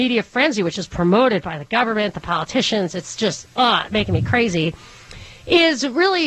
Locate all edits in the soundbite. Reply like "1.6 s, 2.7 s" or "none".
none